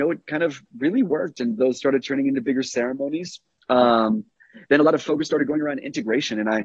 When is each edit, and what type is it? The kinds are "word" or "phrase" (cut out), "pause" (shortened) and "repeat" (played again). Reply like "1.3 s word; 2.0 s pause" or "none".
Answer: none